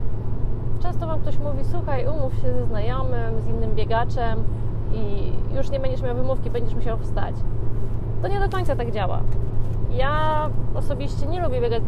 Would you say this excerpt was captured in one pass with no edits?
yes; 0 cuts

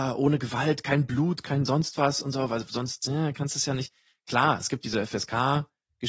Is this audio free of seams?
yes; 0 cuts

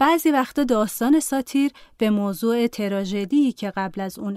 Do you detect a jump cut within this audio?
no; 0 cuts

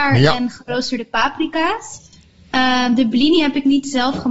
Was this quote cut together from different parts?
no; 0 cuts

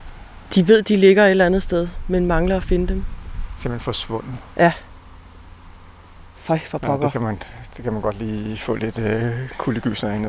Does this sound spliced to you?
no; 0 cuts

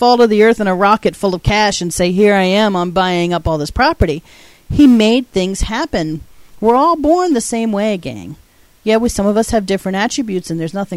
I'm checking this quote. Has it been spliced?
no; 0 cuts

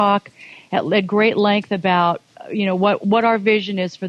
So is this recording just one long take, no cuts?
yes; 0 cuts

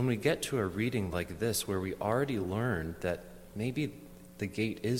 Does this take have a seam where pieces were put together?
no; 0 cuts

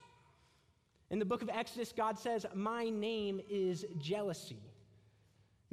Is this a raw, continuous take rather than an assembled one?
yes; 0 cuts

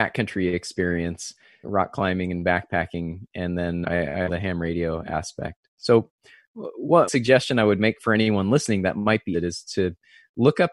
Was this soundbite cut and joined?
yes; 6 cuts; at 1.6 s, 3.8 s, 4.3 s, 7.1 s, 8.0 s, 9.3 s

